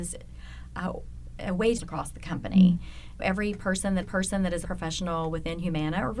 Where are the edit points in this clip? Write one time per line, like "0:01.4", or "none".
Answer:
0:01.8
0:03.2
0:04.0
0:04.6

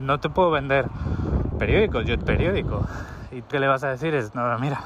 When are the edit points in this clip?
0:01.5
0:02.2
0:03.5

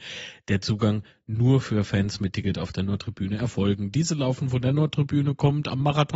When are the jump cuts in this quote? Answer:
none

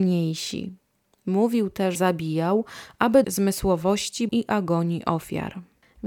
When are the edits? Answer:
0:01.9
0:03.2
0:04.3

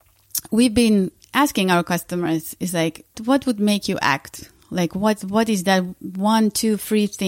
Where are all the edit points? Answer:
0:03.1

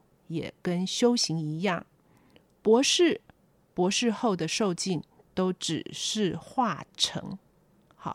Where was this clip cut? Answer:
none

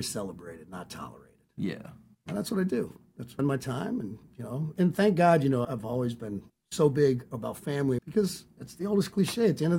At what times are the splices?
0:02.1
0:03.4
0:04.8
0:05.6
0:06.5
0:08.0

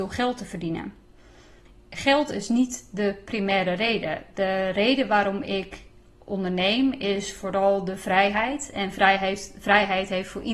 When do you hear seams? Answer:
none

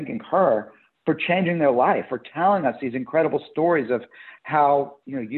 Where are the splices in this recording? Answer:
none

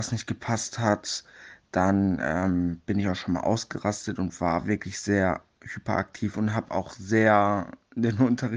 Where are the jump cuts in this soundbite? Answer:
none

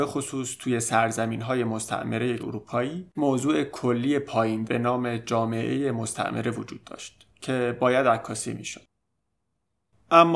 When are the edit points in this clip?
0:02.4
0:03.1
0:04.6

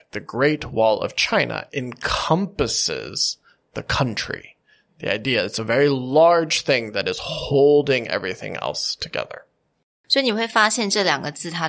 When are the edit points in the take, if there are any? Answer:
none

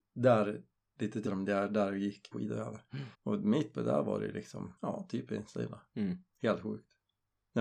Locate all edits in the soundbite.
0:01.3
0:02.3
0:03.1
0:03.7
0:04.8

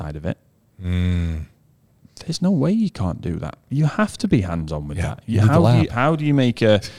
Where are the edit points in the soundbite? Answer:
none

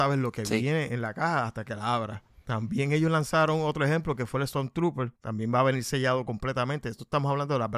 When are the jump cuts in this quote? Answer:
0:05.2

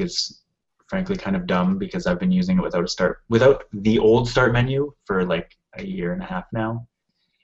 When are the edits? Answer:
none

